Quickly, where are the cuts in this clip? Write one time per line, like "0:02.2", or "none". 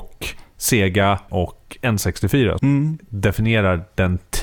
0:01.3
0:02.6